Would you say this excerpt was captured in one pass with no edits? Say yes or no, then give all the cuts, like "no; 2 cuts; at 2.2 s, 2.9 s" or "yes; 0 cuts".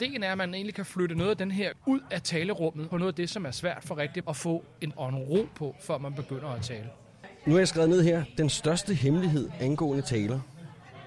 no; 4 cuts; at 1.7 s, 2.9 s, 4.2 s, 4.9 s